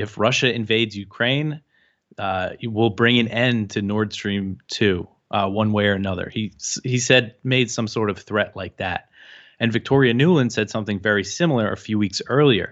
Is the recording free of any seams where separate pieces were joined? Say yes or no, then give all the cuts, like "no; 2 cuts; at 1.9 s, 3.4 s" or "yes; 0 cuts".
yes; 0 cuts